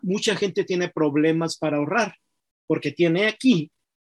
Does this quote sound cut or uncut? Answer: uncut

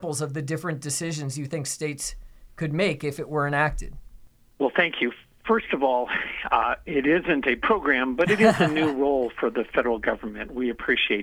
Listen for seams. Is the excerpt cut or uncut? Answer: uncut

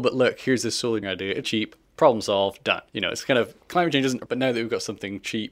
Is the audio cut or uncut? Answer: cut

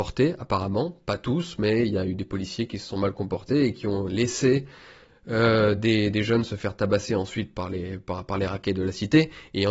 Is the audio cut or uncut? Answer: uncut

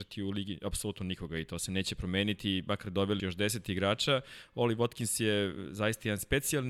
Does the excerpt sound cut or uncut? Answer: cut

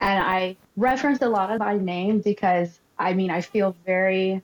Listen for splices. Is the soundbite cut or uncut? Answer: cut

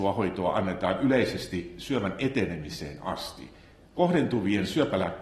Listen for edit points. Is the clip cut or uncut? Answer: uncut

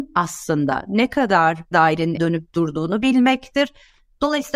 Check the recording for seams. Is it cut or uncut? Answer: cut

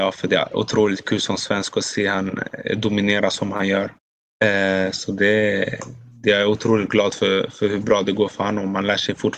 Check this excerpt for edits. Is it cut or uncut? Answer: cut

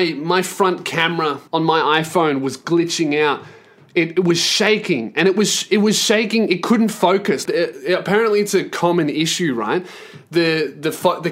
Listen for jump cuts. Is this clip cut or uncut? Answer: cut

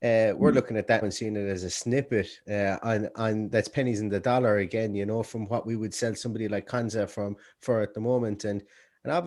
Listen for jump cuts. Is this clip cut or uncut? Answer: cut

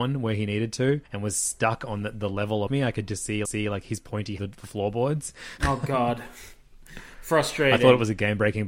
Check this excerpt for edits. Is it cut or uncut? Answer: cut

